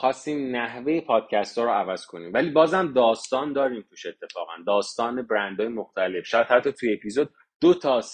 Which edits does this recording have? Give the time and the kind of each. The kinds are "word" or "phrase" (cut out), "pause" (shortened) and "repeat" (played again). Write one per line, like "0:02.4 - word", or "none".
none